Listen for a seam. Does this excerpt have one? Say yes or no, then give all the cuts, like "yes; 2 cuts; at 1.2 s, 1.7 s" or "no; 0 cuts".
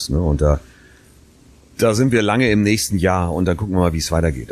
no; 0 cuts